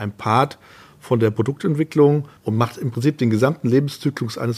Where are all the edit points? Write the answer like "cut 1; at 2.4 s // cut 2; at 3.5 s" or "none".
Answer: cut 1; at 2.4 s